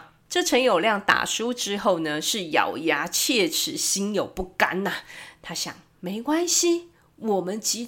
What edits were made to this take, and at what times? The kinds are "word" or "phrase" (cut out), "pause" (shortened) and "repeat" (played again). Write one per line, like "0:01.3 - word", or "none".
none